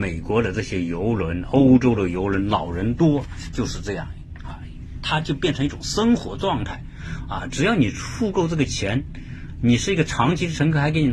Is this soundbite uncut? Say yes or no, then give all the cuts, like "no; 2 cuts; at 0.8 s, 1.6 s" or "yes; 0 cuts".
yes; 0 cuts